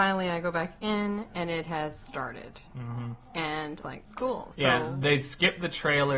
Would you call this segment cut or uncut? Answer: cut